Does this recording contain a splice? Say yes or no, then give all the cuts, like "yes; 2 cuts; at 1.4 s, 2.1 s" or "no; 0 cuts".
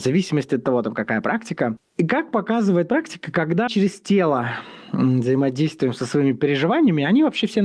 yes; 1 cut; at 3.7 s